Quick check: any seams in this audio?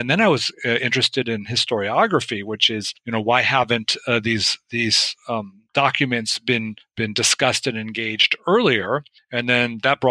yes; 1 cut; at 5.7 s

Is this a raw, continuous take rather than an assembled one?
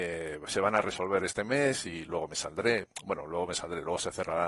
yes; 0 cuts

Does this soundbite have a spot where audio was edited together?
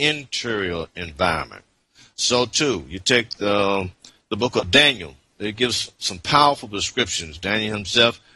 no; 0 cuts

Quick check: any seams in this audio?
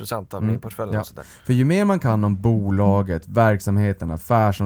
no; 0 cuts

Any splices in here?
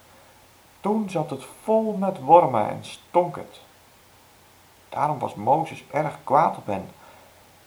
no; 0 cuts

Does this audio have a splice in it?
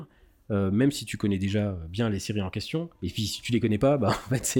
yes; 1 cut; at 2.9 s

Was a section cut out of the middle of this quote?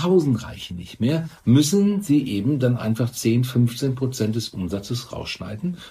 no; 0 cuts

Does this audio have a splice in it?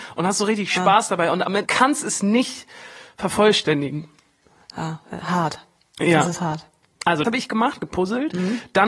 yes; 2 cuts; at 1.7 s, 7.2 s

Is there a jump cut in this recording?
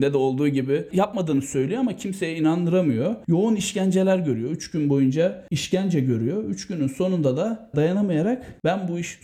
yes; 1 cut; at 7.7 s

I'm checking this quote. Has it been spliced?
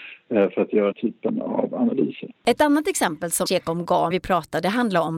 yes; 4 cuts; at 0.9 s, 2.4 s, 3.5 s, 4.1 s

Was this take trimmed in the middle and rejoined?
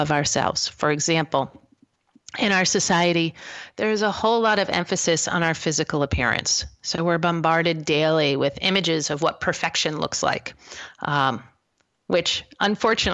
no; 0 cuts

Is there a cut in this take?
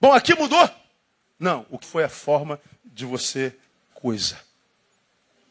yes; 2 cuts; at 1.8 s, 3.9 s

